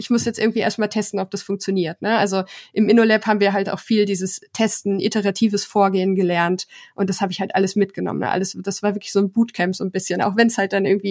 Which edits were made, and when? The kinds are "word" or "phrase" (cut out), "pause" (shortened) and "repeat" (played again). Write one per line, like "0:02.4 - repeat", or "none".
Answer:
none